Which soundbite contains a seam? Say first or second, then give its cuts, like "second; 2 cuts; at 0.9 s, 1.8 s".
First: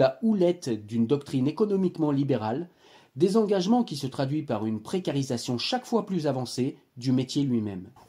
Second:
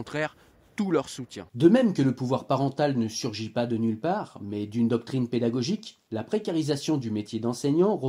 second; 1 cut; at 1.5 s